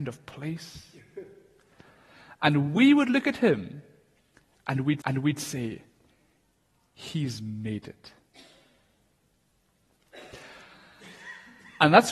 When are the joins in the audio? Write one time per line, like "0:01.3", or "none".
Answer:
0:05.0